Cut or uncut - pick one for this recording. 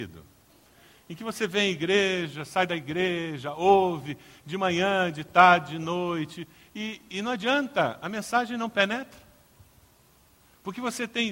uncut